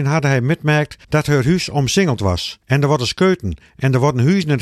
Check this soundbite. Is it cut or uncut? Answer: cut